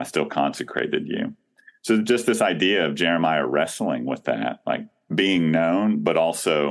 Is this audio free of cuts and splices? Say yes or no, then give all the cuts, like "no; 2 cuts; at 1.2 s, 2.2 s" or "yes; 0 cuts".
yes; 0 cuts